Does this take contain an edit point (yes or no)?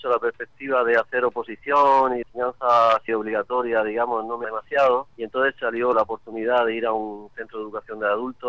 yes